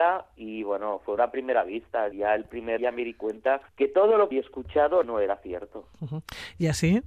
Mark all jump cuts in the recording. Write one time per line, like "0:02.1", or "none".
0:01.2
0:02.1
0:02.8
0:03.7
0:04.3
0:05.0
0:05.9